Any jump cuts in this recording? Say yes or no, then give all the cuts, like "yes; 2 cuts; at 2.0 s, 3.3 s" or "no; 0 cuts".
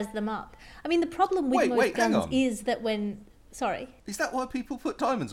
no; 0 cuts